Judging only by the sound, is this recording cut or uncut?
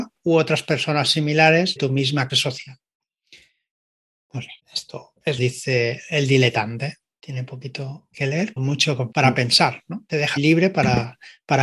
cut